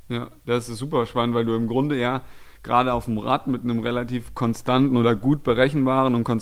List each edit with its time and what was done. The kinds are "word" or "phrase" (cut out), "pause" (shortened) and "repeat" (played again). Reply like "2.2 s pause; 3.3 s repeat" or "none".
none